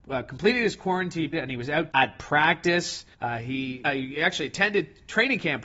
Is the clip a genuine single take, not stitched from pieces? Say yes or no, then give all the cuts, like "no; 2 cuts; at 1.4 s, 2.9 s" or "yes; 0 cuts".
no; 4 cuts; at 1.3 s, 1.9 s, 3.1 s, 3.8 s